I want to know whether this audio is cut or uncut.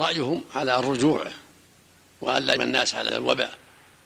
cut